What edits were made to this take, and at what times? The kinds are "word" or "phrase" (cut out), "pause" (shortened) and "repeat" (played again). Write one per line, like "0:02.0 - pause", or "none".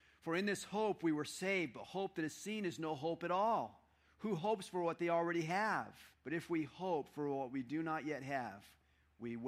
0:06.1 - pause